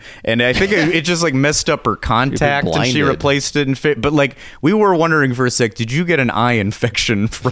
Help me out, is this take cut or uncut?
uncut